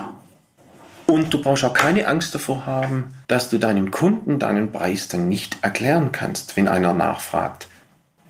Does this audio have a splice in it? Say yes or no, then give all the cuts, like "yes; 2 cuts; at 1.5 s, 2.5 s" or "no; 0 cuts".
yes; 1 cut; at 3.2 s